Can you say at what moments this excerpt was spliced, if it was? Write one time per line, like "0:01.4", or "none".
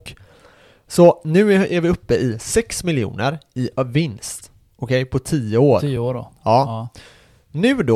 none